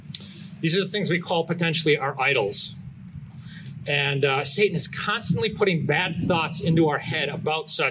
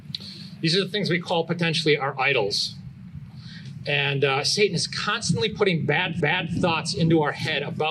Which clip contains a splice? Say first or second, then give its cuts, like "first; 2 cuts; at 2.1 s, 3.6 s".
second; 1 cut; at 6.2 s